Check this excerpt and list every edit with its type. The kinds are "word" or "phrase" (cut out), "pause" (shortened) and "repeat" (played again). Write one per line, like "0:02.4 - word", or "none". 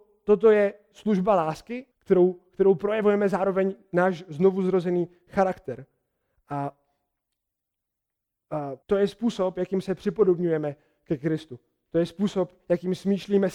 0:01.9 - pause
0:08.8 - pause